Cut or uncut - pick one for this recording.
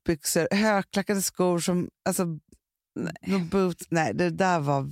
uncut